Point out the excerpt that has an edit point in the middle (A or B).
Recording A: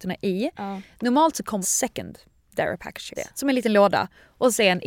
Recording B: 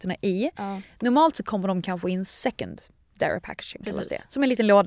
A